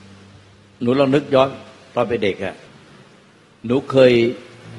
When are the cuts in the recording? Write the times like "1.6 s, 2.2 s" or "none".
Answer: none